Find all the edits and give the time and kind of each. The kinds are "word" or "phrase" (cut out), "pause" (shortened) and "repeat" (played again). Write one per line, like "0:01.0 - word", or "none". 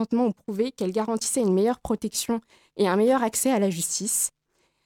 none